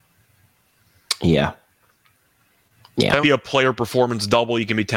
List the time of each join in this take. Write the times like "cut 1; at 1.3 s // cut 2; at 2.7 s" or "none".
cut 1; at 3.2 s